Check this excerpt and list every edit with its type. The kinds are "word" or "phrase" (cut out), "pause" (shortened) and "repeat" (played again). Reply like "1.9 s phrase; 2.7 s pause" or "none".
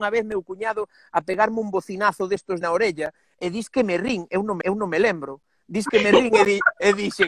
2.6 s phrase; 4.6 s repeat